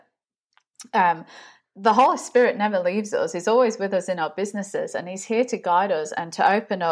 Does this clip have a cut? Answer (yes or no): no